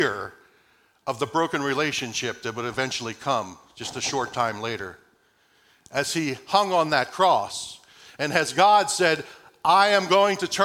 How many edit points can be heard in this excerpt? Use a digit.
0